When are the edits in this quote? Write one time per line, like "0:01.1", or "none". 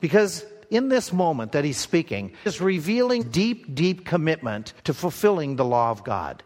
0:02.5
0:03.2
0:04.8